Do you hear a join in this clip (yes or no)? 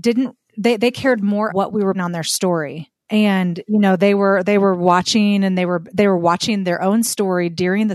yes